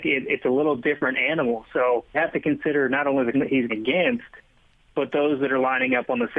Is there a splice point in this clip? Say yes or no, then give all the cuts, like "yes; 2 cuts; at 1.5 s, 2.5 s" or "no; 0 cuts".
yes; 3 cuts; at 2.1 s, 3.3 s, 3.7 s